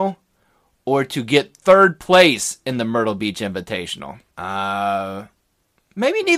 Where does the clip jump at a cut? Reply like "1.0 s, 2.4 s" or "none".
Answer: 4.3 s